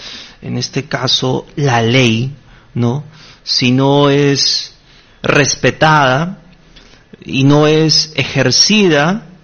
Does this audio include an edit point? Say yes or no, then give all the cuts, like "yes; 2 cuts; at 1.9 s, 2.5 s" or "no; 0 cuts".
no; 0 cuts